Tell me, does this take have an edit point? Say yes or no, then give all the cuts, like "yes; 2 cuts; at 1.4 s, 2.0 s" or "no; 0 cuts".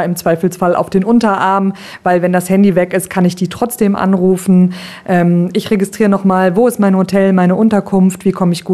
no; 0 cuts